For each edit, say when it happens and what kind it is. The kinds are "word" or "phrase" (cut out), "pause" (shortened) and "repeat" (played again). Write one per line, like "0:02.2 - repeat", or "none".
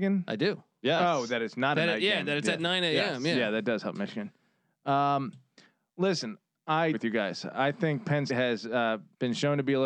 0:06.9 - word
0:08.3 - word